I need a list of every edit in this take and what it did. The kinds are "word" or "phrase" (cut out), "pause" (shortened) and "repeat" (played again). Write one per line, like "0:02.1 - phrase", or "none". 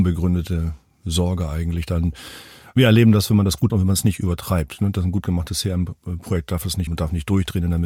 0:03.7 - word
0:06.9 - word